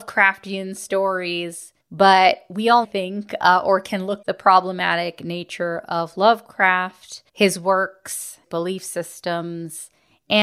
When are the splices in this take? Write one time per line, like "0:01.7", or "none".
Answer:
0:01.8
0:02.8
0:04.2
0:07.3
0:08.4